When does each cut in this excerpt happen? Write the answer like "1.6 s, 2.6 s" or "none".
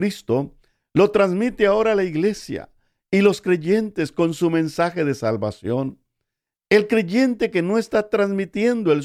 none